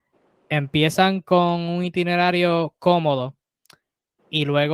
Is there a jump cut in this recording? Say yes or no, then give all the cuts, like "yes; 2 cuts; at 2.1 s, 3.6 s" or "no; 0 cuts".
no; 0 cuts